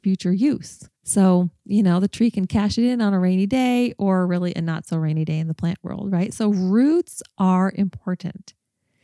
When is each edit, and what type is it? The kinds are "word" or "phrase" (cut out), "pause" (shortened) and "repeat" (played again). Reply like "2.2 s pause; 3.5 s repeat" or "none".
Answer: 0.9 s pause